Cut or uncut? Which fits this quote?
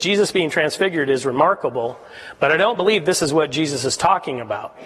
uncut